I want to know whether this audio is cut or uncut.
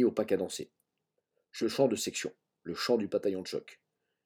cut